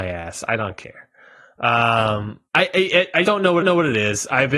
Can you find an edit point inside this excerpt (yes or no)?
yes